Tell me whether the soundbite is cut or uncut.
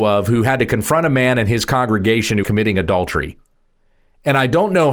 cut